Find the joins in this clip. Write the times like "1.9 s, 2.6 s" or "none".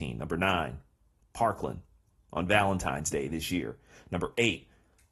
none